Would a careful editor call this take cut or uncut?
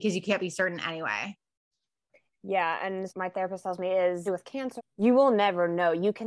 cut